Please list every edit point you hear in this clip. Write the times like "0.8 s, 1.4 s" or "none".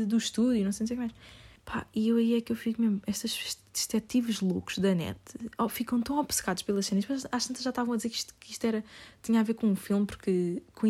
1.6 s